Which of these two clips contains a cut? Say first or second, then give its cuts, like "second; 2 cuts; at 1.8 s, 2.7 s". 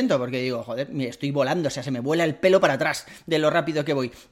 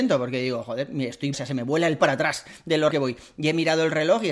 second; 3 cuts; at 1.3 s, 2.0 s, 2.9 s